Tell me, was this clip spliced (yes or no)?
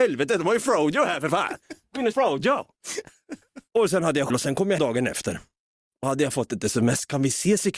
yes